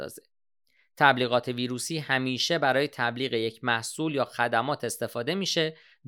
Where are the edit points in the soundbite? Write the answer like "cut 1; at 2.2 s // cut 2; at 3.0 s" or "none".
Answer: none